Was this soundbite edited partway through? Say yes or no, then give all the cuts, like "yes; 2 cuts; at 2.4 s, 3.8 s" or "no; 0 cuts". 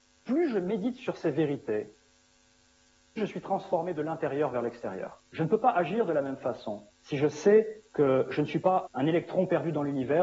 yes; 5 cuts; at 3.2 s, 5.3 s, 6.9 s, 7.9 s, 8.9 s